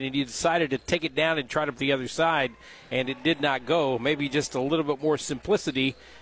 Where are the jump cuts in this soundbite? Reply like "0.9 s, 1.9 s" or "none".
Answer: 1.7 s